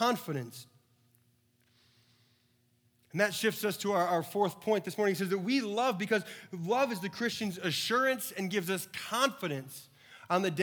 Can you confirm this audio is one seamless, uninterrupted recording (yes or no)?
no